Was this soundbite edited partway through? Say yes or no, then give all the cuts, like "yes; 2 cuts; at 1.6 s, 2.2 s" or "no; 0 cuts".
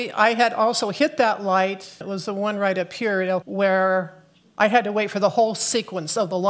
yes; 2 cuts; at 2.0 s, 3.4 s